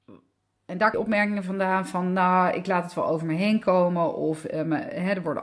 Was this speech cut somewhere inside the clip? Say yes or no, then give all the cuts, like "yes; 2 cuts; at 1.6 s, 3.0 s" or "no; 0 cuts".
yes; 1 cut; at 0.9 s